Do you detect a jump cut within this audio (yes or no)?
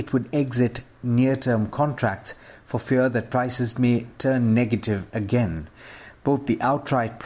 no